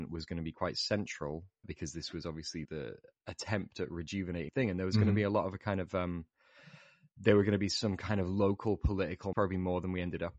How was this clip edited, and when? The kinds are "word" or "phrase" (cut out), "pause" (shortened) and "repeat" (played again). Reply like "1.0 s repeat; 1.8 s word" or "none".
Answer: 1.6 s word; 2.6 s word; 4.5 s word; 9.3 s word